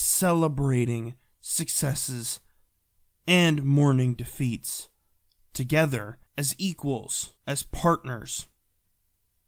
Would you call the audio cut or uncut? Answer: cut